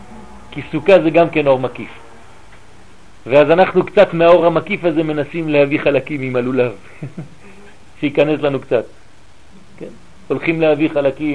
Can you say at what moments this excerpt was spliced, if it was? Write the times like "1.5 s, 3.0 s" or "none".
none